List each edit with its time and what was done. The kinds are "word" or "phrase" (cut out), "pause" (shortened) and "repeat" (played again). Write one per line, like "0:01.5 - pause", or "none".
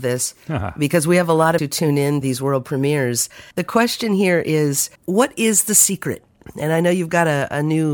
0:01.6 - word
0:02.2 - word
0:03.5 - pause
0:05.0 - pause